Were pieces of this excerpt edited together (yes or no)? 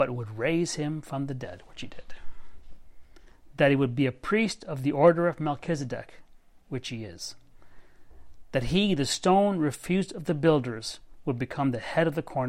no